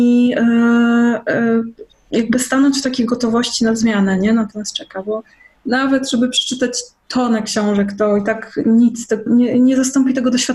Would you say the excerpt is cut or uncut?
cut